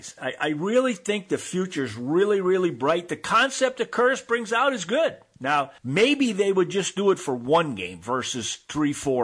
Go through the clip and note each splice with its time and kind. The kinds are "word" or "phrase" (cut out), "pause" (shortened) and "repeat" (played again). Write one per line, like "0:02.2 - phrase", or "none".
0:05.8 - pause